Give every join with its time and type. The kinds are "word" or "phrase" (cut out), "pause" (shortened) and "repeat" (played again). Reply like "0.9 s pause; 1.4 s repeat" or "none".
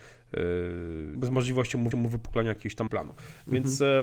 1.1 s word; 1.9 s repeat; 2.9 s word